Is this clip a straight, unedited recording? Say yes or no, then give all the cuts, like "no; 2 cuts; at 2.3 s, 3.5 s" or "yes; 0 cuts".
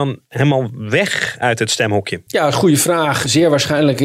no; 1 cut; at 2.3 s